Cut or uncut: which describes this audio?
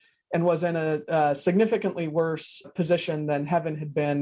cut